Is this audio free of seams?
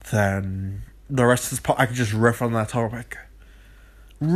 yes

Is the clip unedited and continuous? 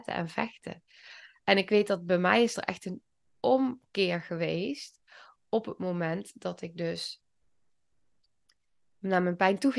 yes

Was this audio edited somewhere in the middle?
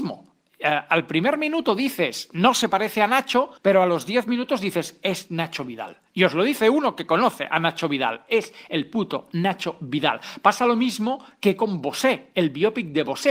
yes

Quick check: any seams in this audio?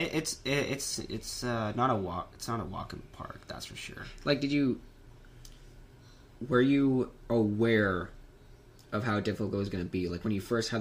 no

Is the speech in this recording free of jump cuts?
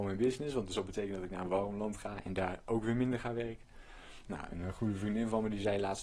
yes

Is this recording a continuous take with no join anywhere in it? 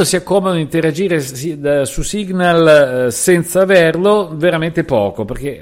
yes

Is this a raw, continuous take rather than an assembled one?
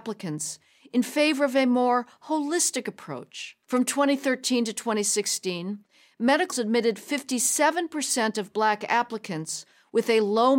no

